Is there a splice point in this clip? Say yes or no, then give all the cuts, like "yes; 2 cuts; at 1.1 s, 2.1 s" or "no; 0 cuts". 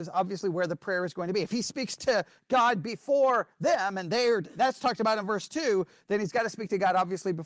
no; 0 cuts